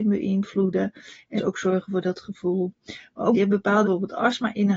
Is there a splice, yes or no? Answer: yes